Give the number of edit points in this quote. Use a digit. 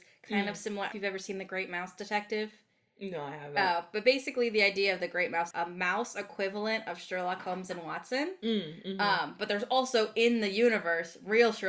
2